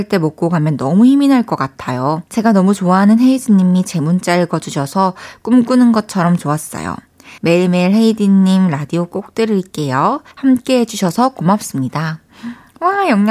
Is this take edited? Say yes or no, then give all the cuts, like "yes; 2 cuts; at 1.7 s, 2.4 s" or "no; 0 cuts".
yes; 3 cuts; at 2.3 s, 7.4 s, 10.3 s